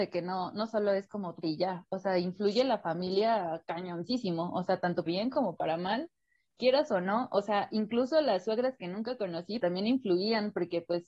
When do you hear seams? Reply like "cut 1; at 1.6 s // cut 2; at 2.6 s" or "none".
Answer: cut 1; at 1.4 s // cut 2; at 5.1 s // cut 3; at 9.6 s